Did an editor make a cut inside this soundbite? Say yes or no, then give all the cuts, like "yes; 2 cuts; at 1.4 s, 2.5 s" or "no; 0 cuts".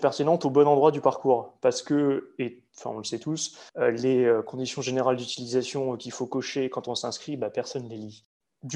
no; 0 cuts